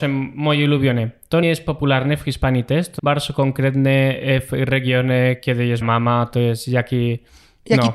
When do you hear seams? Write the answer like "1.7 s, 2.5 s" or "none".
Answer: 1.4 s, 3.0 s, 5.8 s